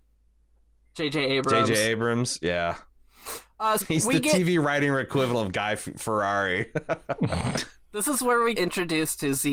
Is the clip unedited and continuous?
no; 2 cuts; at 3.8 s, 8.5 s

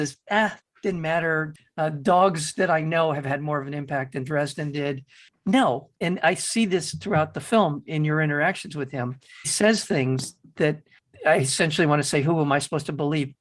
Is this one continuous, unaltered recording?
no; 2 cuts; at 6.0 s, 9.4 s

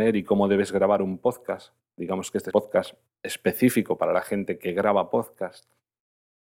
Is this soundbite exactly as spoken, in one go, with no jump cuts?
no; 1 cut; at 2.5 s

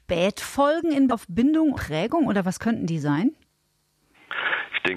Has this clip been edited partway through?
yes; 2 cuts; at 1.1 s, 1.7 s

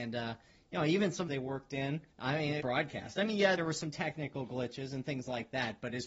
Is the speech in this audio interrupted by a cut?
yes; 4 cuts; at 1.3 s, 2.1 s, 2.6 s, 3.6 s

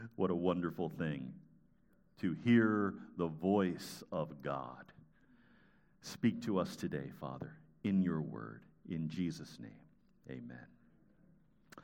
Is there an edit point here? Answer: no; 0 cuts

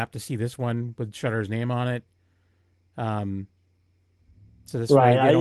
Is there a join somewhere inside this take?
no; 0 cuts

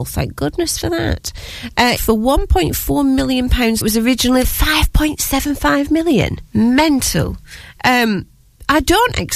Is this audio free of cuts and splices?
no; 4 cuts; at 2.0 s, 3.8 s, 4.4 s, 6.5 s

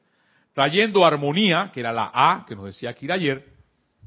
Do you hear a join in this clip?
no; 0 cuts

